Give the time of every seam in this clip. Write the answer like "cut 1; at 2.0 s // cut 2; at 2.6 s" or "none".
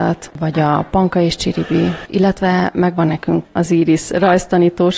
none